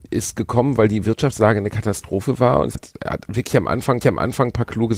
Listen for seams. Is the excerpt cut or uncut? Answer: cut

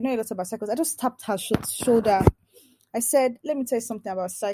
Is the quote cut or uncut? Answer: uncut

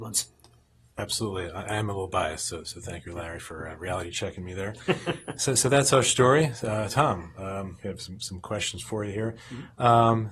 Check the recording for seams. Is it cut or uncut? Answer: cut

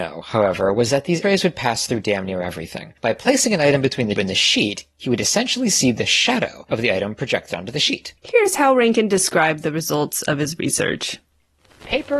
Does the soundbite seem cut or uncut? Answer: cut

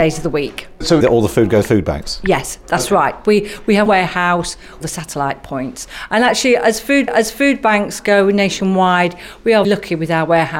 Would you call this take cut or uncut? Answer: cut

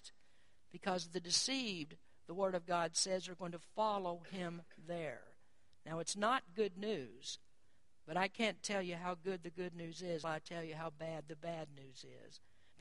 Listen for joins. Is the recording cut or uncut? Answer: cut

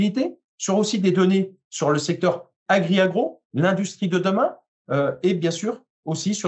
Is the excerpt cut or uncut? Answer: uncut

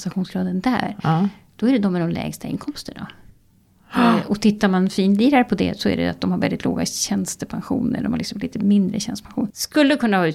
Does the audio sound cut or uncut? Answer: uncut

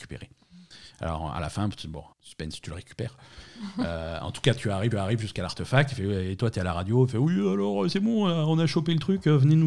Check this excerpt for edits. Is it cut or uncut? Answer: cut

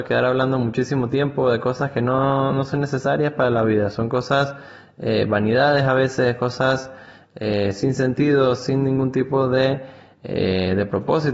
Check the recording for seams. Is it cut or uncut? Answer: uncut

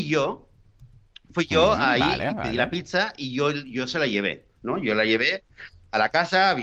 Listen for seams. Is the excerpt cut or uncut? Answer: uncut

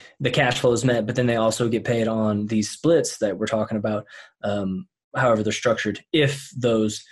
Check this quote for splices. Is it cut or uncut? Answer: uncut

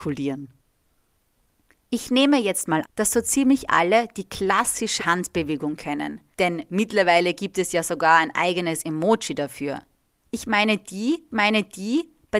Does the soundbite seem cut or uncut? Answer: cut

